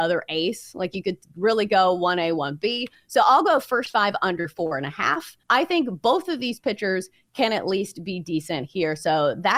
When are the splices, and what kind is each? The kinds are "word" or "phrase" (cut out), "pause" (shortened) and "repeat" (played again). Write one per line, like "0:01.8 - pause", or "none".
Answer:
0:05.4 - pause